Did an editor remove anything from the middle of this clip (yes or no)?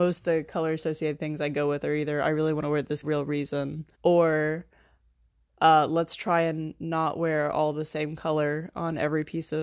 yes